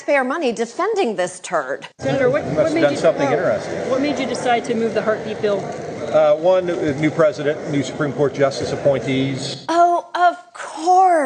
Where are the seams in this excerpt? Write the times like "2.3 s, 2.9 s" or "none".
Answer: 1.9 s